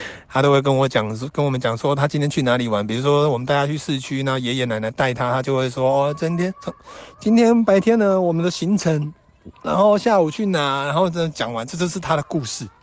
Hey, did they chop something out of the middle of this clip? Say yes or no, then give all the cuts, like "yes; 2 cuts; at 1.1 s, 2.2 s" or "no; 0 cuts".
yes; 1 cut; at 9.5 s